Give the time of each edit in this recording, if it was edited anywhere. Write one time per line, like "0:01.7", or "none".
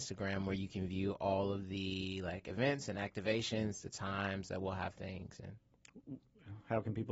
none